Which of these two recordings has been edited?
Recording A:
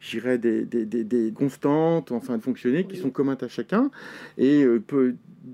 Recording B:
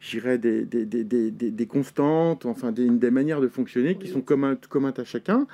A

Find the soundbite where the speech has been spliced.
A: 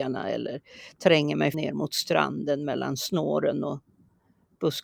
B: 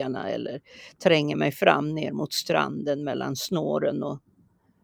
A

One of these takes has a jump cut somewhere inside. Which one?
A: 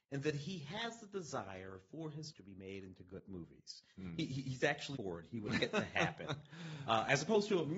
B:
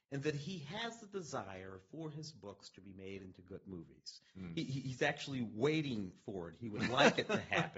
A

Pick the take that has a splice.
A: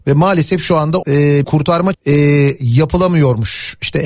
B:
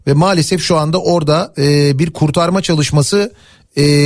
A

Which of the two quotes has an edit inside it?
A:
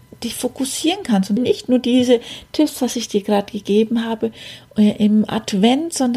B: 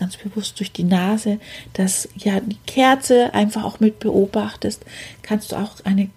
A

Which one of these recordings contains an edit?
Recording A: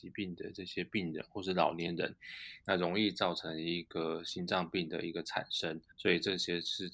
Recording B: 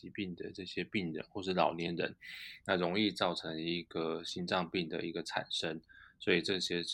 A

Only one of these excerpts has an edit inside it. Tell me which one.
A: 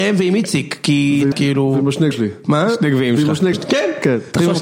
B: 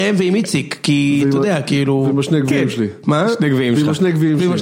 A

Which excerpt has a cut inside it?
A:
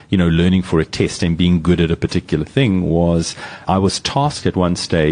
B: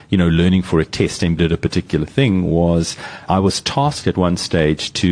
B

